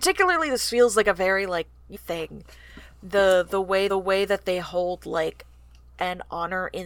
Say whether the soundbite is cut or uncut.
cut